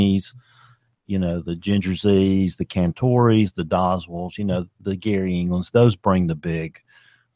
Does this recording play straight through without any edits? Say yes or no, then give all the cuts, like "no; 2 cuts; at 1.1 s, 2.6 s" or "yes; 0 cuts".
yes; 0 cuts